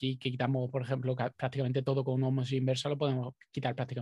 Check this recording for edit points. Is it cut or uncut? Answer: uncut